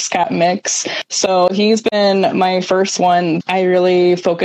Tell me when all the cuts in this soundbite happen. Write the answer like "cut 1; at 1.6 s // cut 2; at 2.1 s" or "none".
cut 1; at 3.4 s